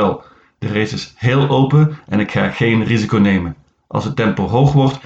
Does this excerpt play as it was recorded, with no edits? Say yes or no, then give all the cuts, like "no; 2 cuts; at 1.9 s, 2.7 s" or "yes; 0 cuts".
yes; 0 cuts